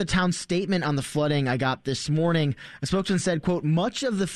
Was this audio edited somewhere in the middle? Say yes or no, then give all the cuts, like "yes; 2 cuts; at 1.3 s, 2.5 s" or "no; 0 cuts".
no; 0 cuts